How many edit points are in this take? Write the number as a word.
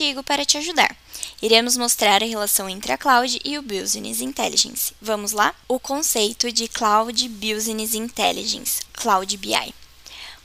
one